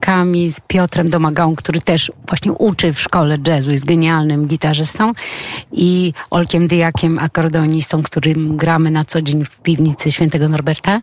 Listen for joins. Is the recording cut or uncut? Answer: uncut